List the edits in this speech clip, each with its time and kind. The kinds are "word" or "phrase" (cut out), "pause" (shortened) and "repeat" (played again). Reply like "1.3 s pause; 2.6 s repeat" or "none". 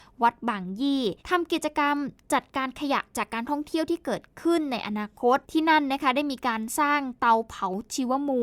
1.2 s pause; 5.4 s pause

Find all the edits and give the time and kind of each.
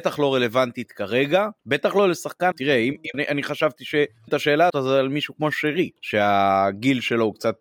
1.6 s pause; 2.5 s word; 3.1 s word; 4.3 s word; 4.7 s word; 6.0 s pause

